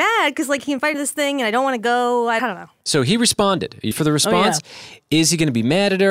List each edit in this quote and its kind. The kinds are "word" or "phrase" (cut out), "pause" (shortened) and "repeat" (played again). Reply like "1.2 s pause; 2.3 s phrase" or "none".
0.9 s word; 2.4 s word; 3.9 s word